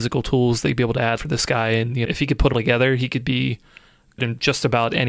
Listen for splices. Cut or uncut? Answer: cut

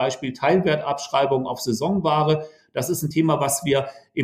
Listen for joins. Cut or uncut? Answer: uncut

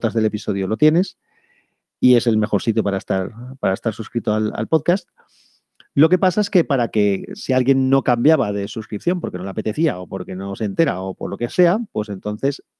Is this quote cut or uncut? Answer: uncut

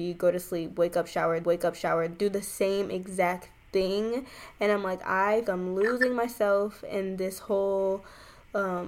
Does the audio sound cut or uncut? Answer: cut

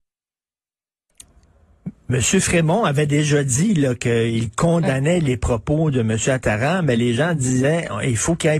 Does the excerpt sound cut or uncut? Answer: uncut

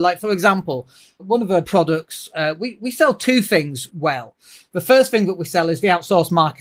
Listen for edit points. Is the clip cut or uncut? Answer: cut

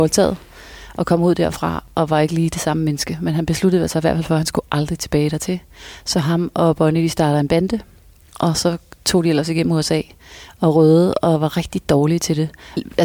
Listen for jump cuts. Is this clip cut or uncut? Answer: uncut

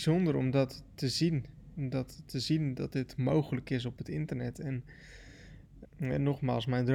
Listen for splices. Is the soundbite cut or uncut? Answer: cut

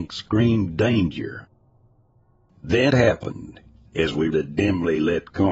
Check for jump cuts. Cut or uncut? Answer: cut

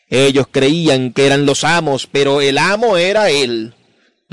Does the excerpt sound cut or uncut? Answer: uncut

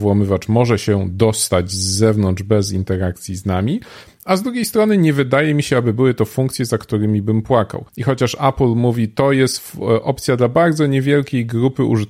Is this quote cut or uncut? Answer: cut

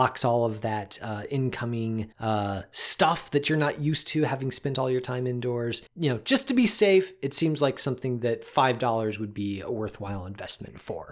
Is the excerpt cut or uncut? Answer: cut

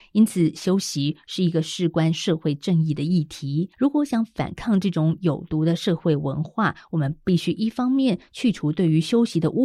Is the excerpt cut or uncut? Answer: cut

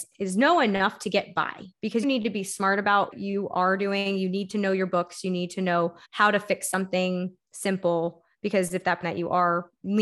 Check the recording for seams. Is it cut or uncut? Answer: cut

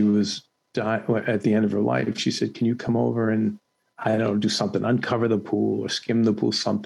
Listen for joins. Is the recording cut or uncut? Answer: uncut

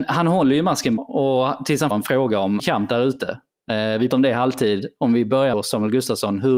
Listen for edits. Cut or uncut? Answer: cut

